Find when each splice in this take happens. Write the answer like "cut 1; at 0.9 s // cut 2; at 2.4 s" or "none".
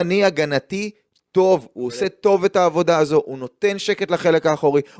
none